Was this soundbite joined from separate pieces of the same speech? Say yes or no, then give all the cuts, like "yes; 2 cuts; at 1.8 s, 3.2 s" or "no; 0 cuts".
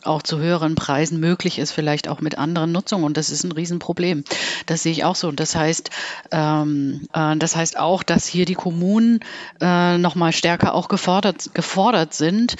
yes; 1 cut; at 7.1 s